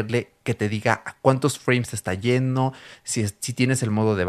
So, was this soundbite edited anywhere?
no; 0 cuts

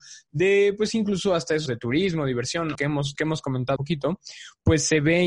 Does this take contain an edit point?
yes; 4 cuts; at 1.7 s, 2.7 s, 3.1 s, 3.8 s

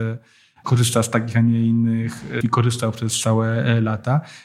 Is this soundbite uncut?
no; 1 cut; at 2.4 s

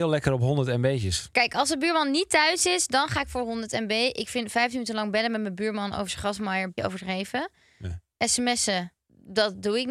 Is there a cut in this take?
yes; 1 cut; at 6.8 s

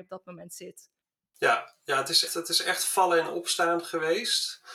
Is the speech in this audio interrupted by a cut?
yes; 2 cuts; at 1.0 s, 2.3 s

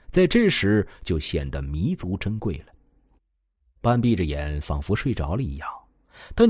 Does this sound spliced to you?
yes; 1 cut; at 3.2 s

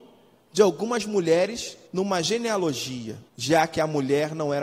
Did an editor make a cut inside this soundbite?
yes; 2 cuts; at 1.9 s, 3.3 s

